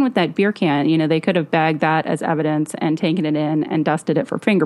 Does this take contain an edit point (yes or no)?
no